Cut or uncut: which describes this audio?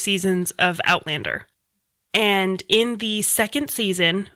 uncut